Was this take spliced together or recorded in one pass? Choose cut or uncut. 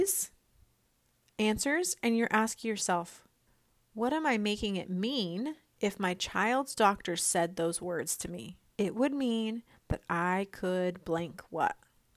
cut